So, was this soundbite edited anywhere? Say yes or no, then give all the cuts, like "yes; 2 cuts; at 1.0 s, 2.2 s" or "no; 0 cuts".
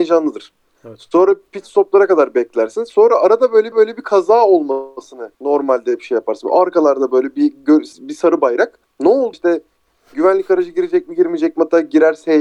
yes; 5 cuts; at 3.7 s, 5.3 s, 7.9 s, 8.8 s, 9.3 s